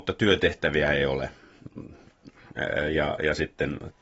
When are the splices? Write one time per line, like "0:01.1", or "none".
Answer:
none